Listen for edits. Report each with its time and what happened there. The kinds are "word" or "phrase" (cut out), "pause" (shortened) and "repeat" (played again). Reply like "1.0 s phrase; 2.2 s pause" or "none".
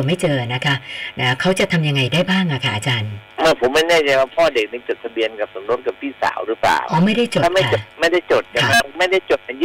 3.3 s pause; 7.9 s pause